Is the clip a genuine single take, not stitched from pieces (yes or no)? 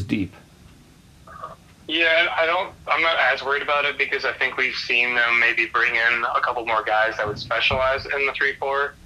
yes